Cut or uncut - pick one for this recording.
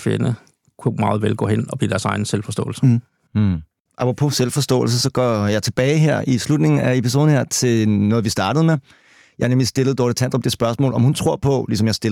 uncut